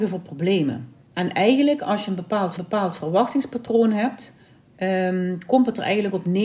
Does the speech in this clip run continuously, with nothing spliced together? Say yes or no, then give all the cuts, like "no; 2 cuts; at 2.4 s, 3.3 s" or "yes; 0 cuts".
no; 2 cuts; at 1.0 s, 2.6 s